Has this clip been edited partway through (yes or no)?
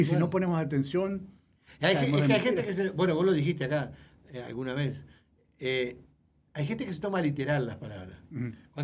no